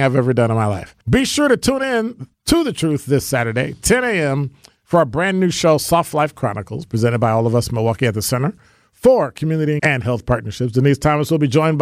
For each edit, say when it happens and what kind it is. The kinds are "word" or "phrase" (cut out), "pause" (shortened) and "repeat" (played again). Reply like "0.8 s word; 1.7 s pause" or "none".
1.0 s pause; 2.3 s pause; 9.8 s word